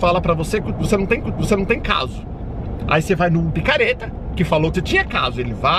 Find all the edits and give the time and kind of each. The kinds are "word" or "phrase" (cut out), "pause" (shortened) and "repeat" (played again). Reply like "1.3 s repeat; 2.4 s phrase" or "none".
1.2 s repeat; 3.5 s word; 4.7 s word

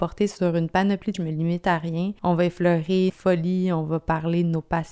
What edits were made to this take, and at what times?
1.1 s word; 3.1 s word

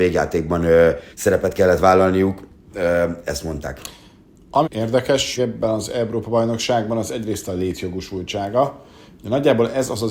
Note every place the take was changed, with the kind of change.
1.1 s pause; 4.6 s word; 5.4 s word

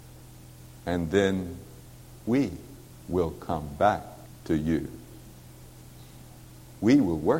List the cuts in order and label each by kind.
2.9 s pause; 4.2 s pause

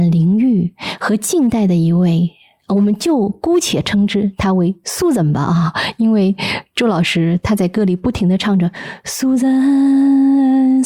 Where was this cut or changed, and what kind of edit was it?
none

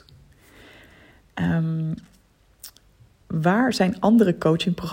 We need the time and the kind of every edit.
none

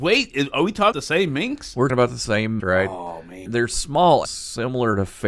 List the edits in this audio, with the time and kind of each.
0.9 s word; 1.9 s word; 2.6 s word; 3.5 s word; 4.2 s word

